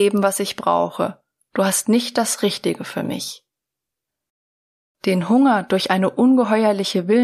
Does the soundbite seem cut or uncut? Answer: uncut